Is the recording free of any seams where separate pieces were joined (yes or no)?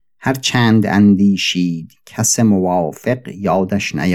yes